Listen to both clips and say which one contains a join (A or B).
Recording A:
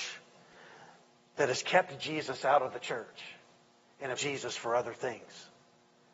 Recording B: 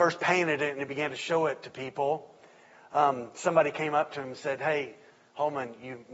A